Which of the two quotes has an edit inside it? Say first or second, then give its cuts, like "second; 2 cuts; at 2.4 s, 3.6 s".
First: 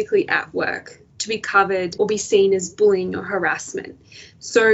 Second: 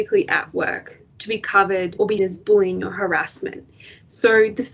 second; 1 cut; at 2.2 s